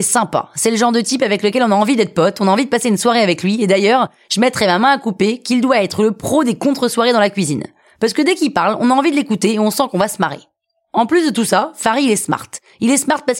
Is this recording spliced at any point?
no; 0 cuts

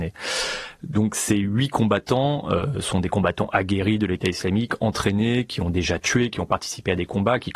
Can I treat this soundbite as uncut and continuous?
yes; 0 cuts

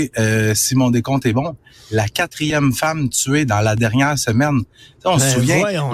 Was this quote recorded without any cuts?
yes; 0 cuts

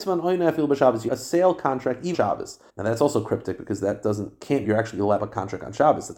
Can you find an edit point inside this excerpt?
yes; 5 cuts; at 1.1 s, 2.1 s, 2.7 s, 4.6 s, 5.2 s

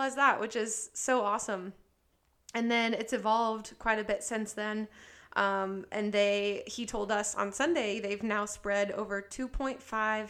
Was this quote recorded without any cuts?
yes; 0 cuts

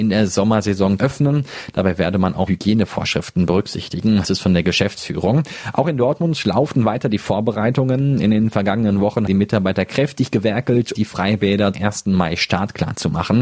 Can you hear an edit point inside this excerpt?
yes; 6 cuts; at 1.0 s, 2.5 s, 4.2 s, 9.3 s, 10.9 s, 11.7 s

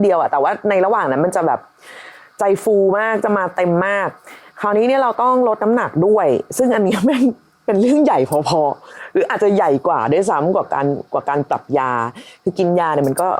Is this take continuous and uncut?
yes; 0 cuts

